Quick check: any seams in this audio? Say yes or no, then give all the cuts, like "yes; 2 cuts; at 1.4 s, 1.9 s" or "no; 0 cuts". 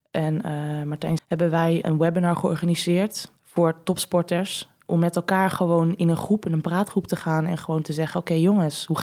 yes; 3 cuts; at 1.2 s, 1.8 s, 3.4 s